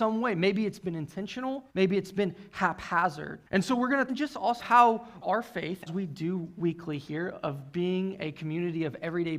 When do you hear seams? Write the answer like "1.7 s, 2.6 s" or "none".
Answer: 1.7 s, 3.5 s, 4.1 s, 4.6 s, 5.2 s, 5.9 s